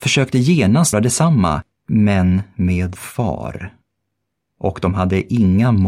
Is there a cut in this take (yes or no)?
yes